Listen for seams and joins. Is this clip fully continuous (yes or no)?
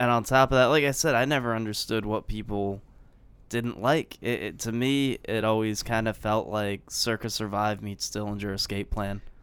yes